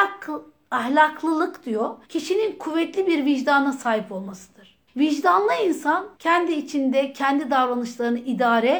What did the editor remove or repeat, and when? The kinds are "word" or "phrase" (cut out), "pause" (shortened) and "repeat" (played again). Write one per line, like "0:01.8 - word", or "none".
0:02.0 - pause
0:04.9 - pause
0:06.1 - pause

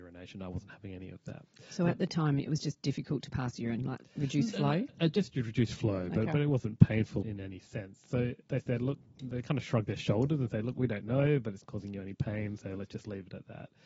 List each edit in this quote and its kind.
0:07.2 - word
0:08.4 - pause
0:11.6 - word

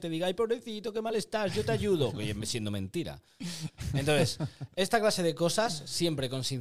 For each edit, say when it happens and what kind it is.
none

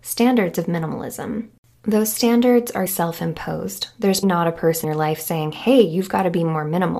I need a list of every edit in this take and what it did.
0:02.9 - word
0:04.2 - word
0:04.8 - word

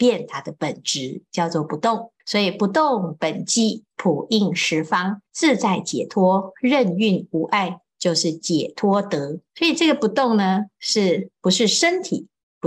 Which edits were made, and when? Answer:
0:02.2 - pause
0:05.3 - pause
0:09.5 - pause

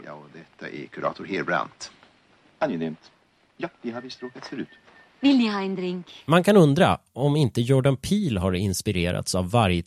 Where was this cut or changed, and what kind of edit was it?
none

